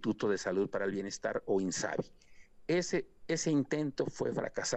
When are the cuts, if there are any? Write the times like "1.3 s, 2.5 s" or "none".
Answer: none

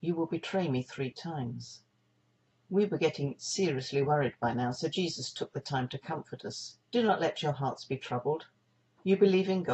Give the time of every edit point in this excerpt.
2.5 s, 6.8 s

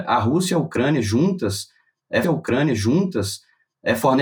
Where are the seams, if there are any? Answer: 2.2 s

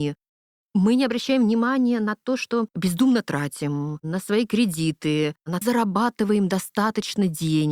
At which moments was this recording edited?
5.6 s

